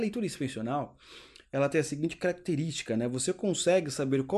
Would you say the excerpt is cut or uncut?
uncut